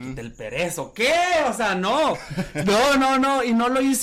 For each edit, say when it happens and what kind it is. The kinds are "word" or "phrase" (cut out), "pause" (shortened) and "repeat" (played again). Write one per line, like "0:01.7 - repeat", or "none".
none